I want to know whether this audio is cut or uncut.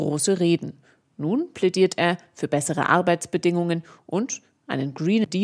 uncut